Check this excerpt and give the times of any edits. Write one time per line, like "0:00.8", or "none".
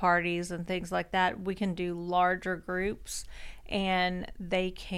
none